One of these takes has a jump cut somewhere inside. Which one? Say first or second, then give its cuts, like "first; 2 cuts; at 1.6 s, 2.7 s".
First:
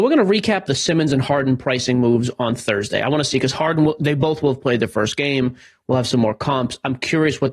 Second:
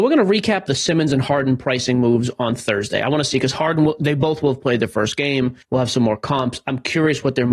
second; 1 cut; at 5.6 s